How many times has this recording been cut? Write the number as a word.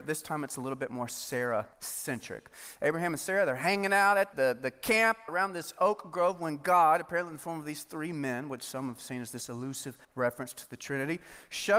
four